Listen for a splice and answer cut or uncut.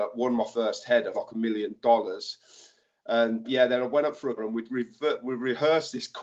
cut